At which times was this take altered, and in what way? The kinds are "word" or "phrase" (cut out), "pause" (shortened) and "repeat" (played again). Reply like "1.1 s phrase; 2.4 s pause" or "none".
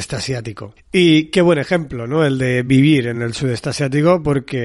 none